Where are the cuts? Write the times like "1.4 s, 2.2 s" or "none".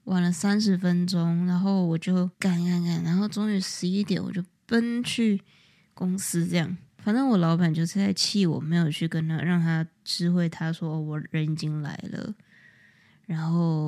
2.3 s

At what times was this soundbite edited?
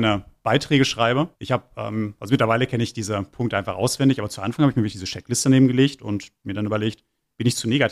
1.3 s

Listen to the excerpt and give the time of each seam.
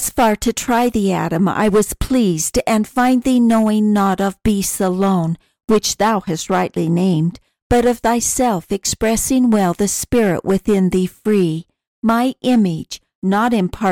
none

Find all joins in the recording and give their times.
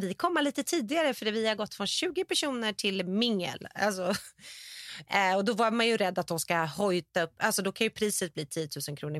none

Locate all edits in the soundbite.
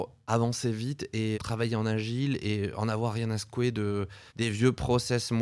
1.3 s, 4.3 s

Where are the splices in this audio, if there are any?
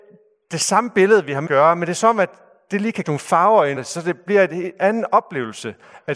1.5 s, 3.0 s, 3.8 s

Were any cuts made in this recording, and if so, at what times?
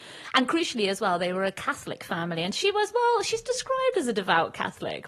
none

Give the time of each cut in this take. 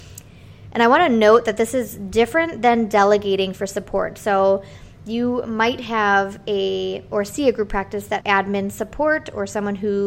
8.2 s

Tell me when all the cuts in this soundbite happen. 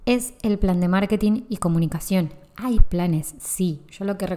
2.8 s

